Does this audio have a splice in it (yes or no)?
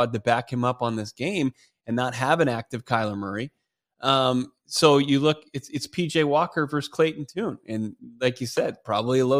no